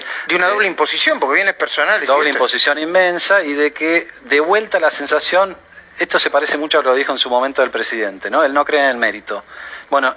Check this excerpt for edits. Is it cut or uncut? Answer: uncut